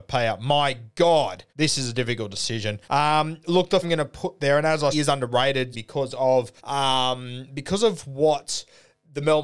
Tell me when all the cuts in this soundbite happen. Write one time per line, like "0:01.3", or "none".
0:01.5
0:02.8
0:03.8
0:04.9
0:05.7
0:06.6